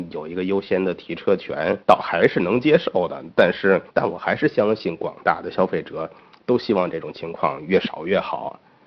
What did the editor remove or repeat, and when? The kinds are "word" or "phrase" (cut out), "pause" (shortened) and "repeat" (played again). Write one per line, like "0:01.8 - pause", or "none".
0:01.8 - pause
0:03.9 - pause